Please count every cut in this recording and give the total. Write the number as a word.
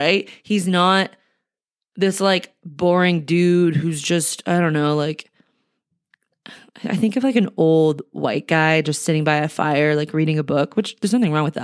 zero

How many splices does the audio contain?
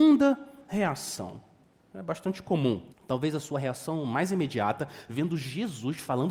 one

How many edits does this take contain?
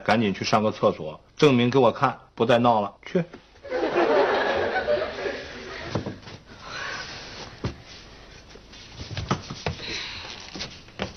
three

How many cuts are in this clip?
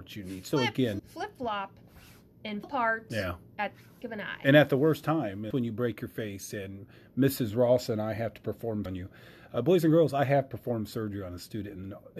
five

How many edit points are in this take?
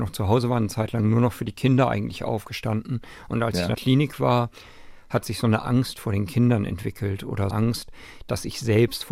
two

